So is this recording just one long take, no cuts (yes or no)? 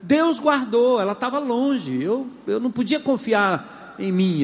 yes